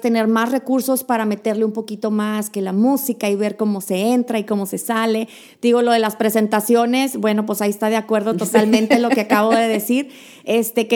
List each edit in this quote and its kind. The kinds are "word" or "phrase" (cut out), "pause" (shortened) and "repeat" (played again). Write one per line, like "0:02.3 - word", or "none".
none